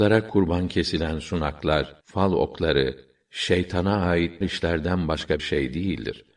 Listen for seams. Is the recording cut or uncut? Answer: cut